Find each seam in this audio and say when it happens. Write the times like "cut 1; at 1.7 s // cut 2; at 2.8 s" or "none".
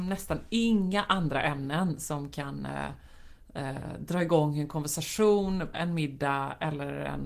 cut 1; at 5.7 s